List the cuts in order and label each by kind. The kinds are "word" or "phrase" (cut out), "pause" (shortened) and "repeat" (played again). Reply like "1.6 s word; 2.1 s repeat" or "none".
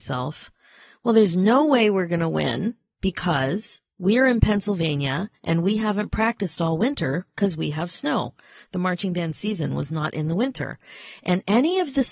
none

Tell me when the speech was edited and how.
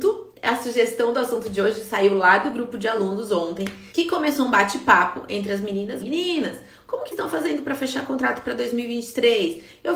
3.9 s pause; 6.0 s word; 7.1 s word

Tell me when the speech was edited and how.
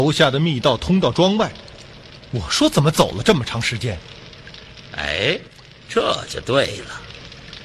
none

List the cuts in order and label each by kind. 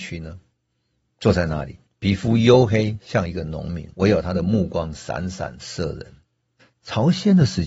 1.9 s pause; 3.9 s pause; 6.6 s pause

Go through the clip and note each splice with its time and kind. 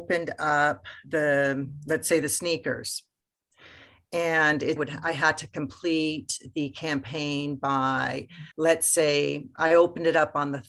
4.8 s phrase; 8.5 s pause

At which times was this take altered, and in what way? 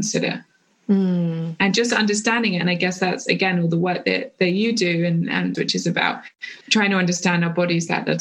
5.5 s phrase; 6.6 s pause

